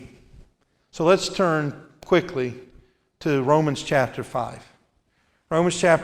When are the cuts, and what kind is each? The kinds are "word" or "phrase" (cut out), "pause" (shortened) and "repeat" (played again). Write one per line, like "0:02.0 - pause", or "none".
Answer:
none

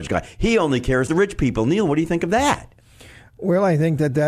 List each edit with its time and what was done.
0:01.1 - word

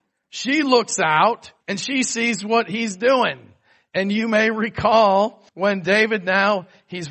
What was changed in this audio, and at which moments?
0:01.6 - pause
0:05.5 - pause

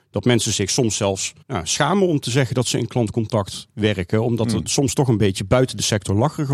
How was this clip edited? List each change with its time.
0:01.4 - pause

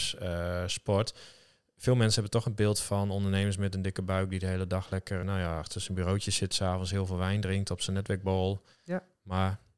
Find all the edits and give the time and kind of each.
0:05.2 - word

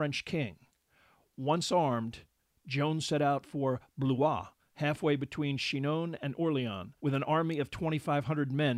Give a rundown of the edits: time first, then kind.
0:07.0 - pause

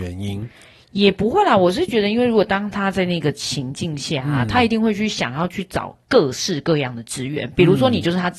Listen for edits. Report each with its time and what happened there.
none

